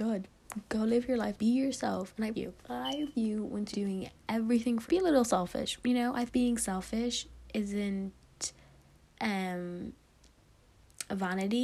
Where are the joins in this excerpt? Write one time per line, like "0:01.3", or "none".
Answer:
0:01.4
0:02.3
0:03.1
0:03.7
0:04.9
0:06.3